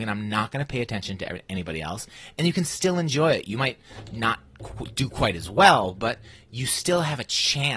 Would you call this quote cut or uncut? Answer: uncut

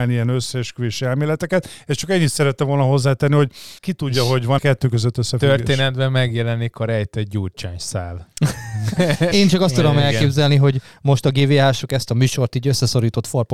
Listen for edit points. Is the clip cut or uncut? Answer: cut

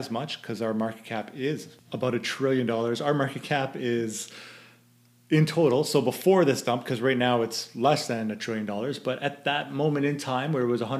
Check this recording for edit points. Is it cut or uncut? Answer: uncut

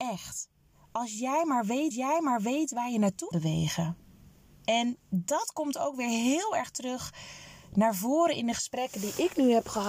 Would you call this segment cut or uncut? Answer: cut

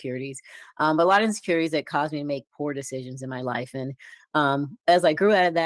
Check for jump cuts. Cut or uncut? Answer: uncut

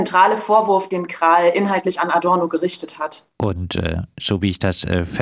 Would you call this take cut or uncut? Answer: cut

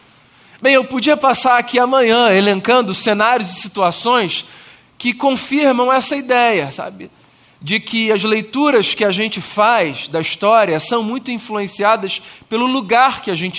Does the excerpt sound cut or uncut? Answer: uncut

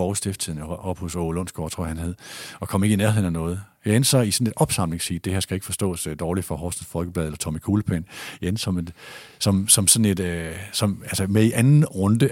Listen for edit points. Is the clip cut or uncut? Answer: uncut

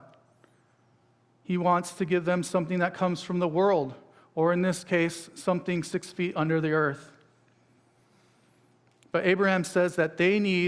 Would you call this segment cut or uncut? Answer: uncut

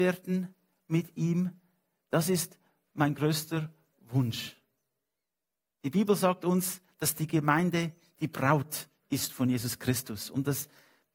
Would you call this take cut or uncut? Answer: uncut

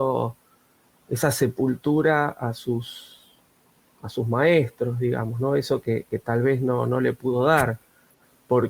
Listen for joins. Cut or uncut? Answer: uncut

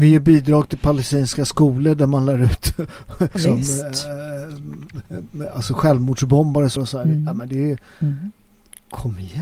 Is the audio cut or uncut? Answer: cut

